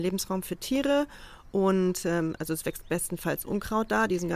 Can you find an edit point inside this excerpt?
no; 0 cuts

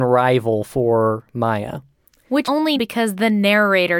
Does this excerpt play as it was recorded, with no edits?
no; 2 cuts; at 2.4 s, 2.8 s

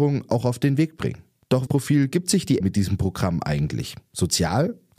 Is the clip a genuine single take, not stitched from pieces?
no; 2 cuts; at 1.7 s, 2.6 s

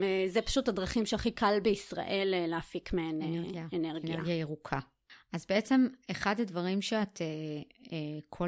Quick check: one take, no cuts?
yes; 0 cuts

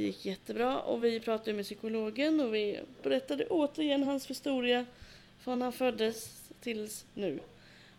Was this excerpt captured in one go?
yes; 0 cuts

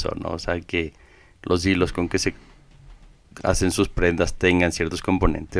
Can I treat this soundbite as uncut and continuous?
yes; 0 cuts

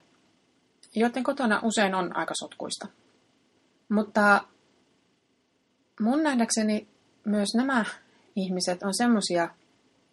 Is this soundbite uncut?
yes; 0 cuts

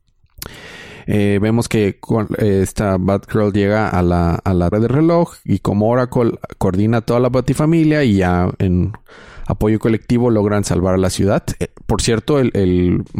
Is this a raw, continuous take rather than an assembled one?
no; 1 cut; at 4.7 s

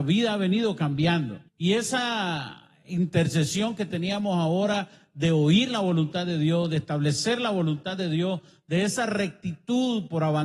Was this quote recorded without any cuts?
no; 1 cut; at 1.5 s

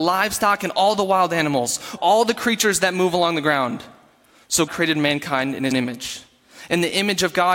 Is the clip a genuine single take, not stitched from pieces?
no; 3 cuts; at 2.0 s, 4.7 s, 5.7 s

